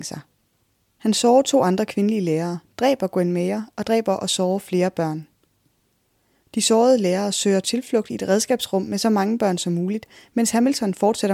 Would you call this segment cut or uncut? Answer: uncut